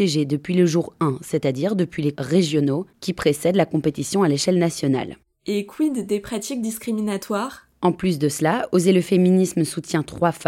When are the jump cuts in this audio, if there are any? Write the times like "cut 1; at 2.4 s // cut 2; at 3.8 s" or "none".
cut 1; at 2.1 s